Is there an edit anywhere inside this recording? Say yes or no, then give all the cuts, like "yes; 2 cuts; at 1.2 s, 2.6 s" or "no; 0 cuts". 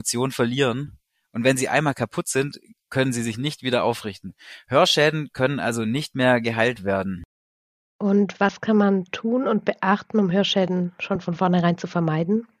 no; 0 cuts